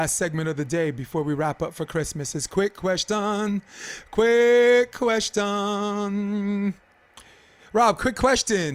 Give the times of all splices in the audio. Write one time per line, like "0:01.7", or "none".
none

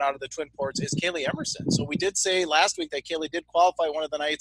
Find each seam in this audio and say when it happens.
none

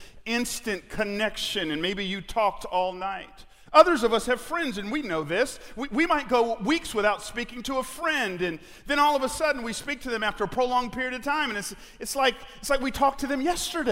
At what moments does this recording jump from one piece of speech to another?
none

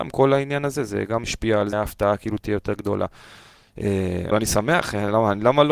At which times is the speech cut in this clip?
0:01.2
0:01.7
0:04.3

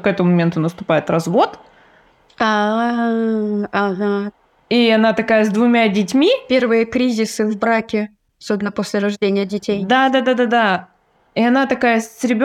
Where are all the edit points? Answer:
none

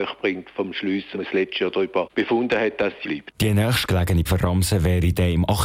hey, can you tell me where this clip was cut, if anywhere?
0:01.1
0:03.0
0:04.3

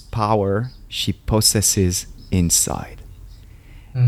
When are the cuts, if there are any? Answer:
none

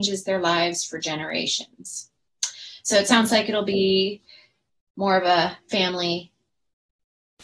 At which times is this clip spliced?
none

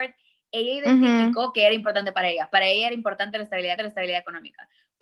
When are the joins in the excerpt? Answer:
0:03.8

